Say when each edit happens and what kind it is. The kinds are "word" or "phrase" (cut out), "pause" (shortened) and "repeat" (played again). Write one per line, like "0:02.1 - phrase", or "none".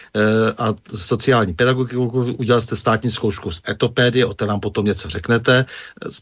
none